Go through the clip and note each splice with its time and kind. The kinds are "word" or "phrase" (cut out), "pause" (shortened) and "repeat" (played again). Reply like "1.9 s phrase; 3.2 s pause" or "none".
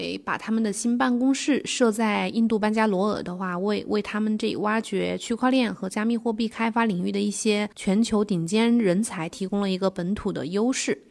7.7 s pause